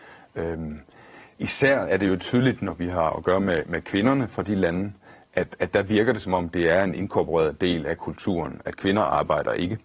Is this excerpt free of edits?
yes; 0 cuts

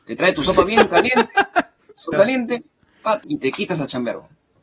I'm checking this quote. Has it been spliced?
yes; 2 cuts; at 2.1 s, 3.2 s

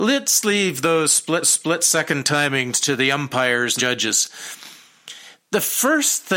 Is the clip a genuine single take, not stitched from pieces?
no; 3 cuts; at 1.4 s, 2.8 s, 3.8 s

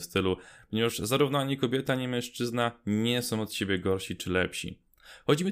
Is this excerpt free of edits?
yes; 0 cuts

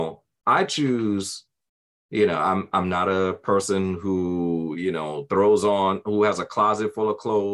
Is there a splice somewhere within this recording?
no; 0 cuts

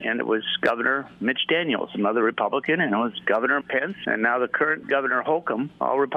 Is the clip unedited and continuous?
no; 2 cuts; at 3.6 s, 4.0 s

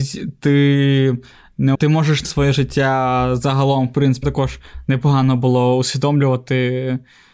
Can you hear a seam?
yes; 3 cuts; at 1.7 s, 2.2 s, 4.2 s

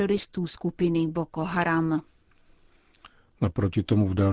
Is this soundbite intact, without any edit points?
yes; 0 cuts

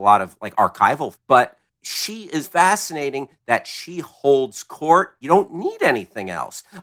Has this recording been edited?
yes; 3 cuts; at 1.1 s, 2.4 s, 5.2 s

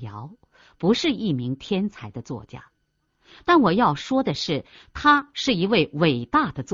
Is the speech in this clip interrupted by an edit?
no; 0 cuts

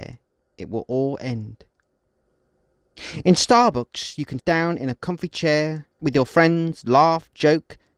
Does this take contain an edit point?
yes; 2 cuts; at 4.4 s, 6.0 s

